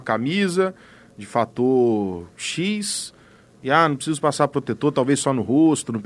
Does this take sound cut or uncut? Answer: uncut